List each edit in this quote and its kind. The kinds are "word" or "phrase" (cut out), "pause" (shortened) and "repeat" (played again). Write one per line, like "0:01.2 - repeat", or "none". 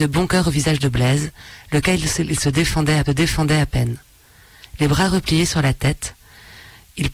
0:03.1 - repeat

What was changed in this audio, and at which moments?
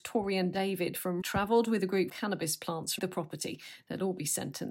0:01.2 - word
0:02.1 - phrase
0:03.0 - word

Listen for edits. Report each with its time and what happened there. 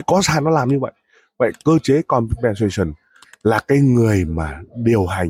none

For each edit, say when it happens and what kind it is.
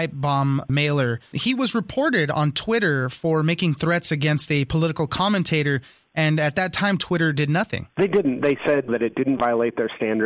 none

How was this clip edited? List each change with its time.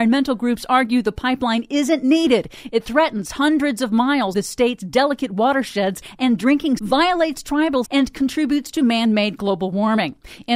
0:04.3 - word
0:06.8 - word
0:07.9 - word

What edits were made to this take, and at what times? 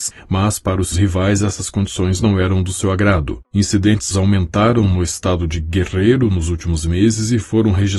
0:00.9 - word
0:04.1 - word

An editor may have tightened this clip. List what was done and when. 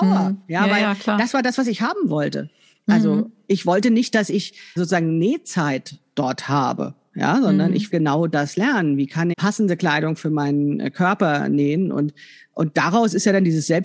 0:04.8 - word
0:07.9 - word
0:09.3 - word

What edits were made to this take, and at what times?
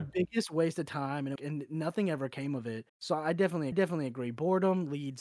0:01.4 - phrase
0:02.9 - pause
0:03.7 - repeat

